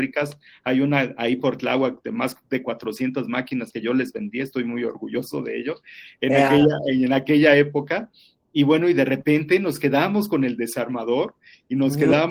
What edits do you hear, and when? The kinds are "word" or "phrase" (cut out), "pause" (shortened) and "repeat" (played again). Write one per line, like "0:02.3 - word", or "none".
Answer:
none